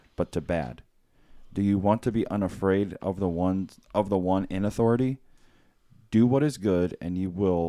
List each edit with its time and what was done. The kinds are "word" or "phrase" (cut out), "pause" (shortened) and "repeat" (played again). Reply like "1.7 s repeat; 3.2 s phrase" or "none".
none